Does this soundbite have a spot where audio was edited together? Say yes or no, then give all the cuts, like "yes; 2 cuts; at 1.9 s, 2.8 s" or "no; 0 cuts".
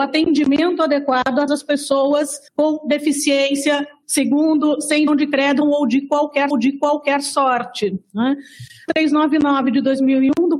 yes; 7 cuts; at 1.5 s, 2.5 s, 4.0 s, 5.1 s, 5.6 s, 6.5 s, 8.9 s